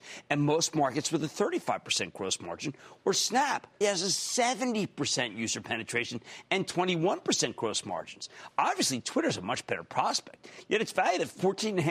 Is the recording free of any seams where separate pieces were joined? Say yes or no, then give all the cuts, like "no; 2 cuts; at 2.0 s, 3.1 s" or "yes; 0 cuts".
no; 1 cut; at 3.8 s